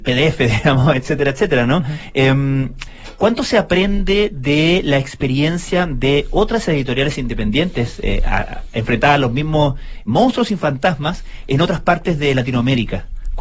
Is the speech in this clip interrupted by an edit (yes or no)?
no